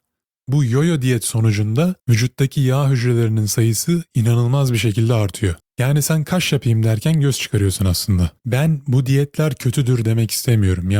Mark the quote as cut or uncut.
cut